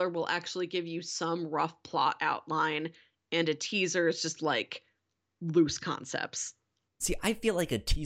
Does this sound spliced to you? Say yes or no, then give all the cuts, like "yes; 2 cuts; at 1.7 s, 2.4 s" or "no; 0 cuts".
no; 0 cuts